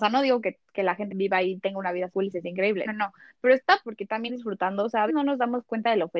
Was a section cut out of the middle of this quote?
yes; 7 cuts; at 1.1 s, 2.1 s, 2.4 s, 2.8 s, 3.8 s, 4.3 s, 5.1 s

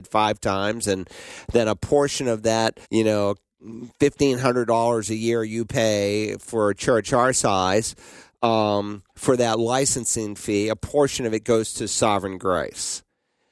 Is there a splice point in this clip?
yes; 2 cuts; at 2.8 s, 9.1 s

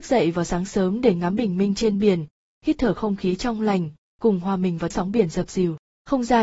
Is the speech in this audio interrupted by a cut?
yes; 1 cut; at 4.9 s

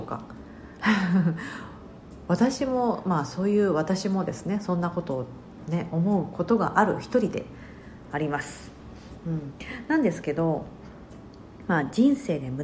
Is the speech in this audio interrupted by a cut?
no; 0 cuts

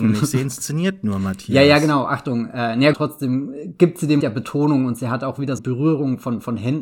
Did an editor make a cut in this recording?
yes; 3 cuts; at 2.9 s, 4.2 s, 5.6 s

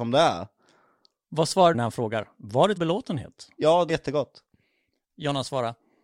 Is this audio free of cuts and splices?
no; 3 cuts; at 1.7 s, 2.8 s, 3.9 s

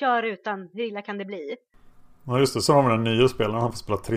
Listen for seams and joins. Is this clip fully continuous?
yes; 0 cuts

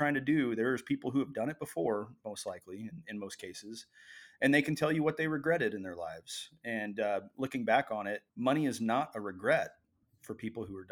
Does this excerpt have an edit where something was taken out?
yes; 1 cut; at 8.3 s

